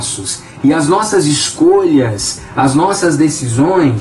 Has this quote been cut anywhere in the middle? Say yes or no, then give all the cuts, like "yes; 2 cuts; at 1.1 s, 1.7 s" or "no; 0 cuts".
no; 0 cuts